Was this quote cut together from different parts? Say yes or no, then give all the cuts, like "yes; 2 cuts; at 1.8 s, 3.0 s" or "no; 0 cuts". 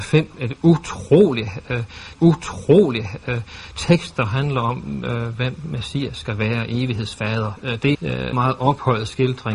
yes; 3 cuts; at 2.1 s, 7.9 s, 8.3 s